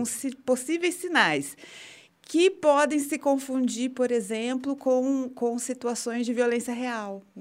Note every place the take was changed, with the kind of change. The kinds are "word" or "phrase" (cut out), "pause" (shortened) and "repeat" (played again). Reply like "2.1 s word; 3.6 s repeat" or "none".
none